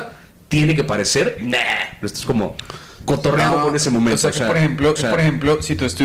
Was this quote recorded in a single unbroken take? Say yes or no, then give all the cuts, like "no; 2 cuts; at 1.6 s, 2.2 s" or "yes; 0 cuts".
no; 3 cuts; at 1.4 s, 3.5 s, 5.0 s